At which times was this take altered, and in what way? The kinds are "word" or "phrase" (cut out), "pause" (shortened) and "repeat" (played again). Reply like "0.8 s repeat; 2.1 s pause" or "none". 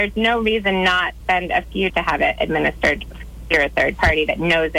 1.2 s word; 1.9 s word